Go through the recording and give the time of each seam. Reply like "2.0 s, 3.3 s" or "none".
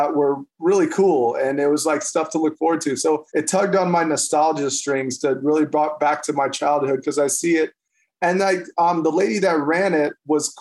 3.3 s